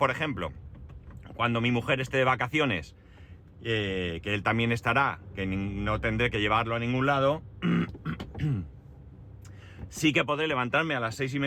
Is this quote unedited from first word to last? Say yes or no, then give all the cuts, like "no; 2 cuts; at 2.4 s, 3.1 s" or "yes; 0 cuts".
yes; 0 cuts